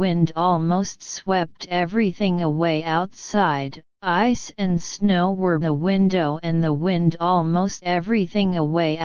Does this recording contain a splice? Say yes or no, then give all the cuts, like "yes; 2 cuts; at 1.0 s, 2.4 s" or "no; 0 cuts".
yes; 3 cuts; at 3.9 s, 5.6 s, 7.8 s